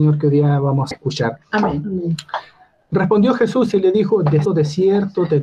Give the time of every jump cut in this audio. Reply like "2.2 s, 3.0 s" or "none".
0.9 s, 4.4 s